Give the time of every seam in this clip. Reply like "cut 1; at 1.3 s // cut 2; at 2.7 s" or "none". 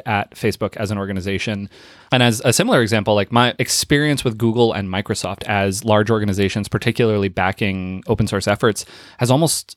none